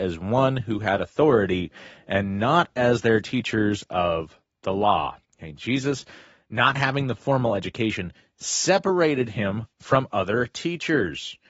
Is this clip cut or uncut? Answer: cut